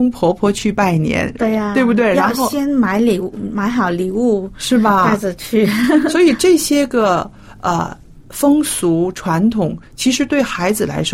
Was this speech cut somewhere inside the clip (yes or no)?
no